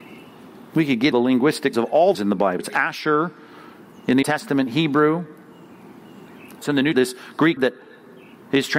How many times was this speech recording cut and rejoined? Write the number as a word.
eight